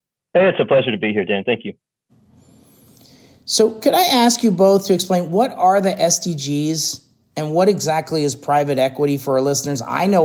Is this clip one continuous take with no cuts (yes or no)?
yes